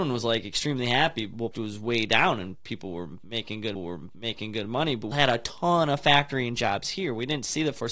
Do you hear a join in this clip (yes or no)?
yes